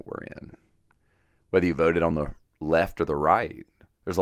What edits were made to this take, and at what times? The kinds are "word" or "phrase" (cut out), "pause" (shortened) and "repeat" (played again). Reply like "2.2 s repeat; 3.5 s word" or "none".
none